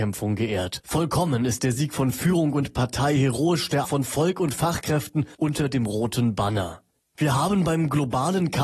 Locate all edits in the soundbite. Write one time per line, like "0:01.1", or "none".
0:03.8
0:05.3